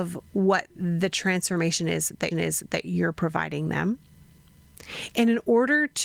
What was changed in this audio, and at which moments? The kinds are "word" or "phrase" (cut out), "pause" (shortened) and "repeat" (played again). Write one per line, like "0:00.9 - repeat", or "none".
0:02.3 - repeat